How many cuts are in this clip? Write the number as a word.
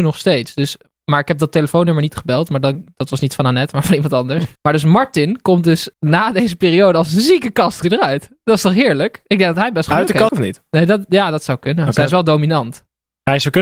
four